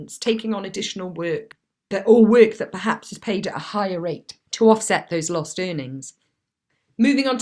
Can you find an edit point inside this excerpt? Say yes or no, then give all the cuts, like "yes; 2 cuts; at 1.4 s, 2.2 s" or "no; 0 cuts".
no; 0 cuts